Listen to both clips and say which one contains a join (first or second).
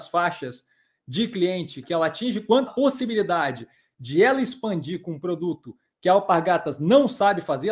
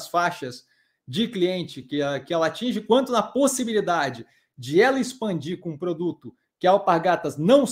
first